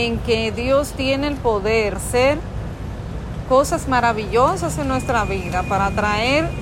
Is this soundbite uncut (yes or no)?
no